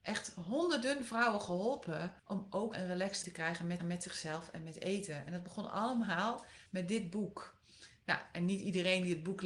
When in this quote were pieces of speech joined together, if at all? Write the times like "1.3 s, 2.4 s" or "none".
2.2 s, 2.7 s, 3.2 s, 3.8 s, 6.7 s